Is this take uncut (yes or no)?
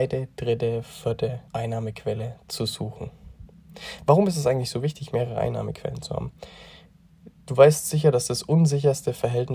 no